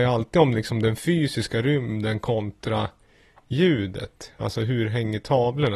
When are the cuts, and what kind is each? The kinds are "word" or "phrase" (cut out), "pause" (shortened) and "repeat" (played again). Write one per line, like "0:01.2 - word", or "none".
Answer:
none